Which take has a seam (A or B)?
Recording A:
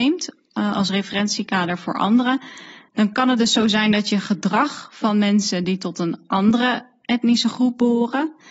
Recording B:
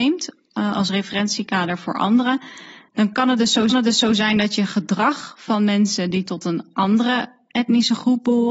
B